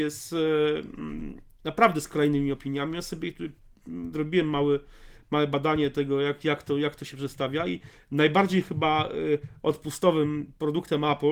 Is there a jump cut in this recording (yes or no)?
no